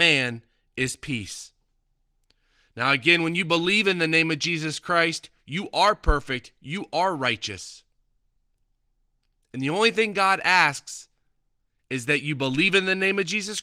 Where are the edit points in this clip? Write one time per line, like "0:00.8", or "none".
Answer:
none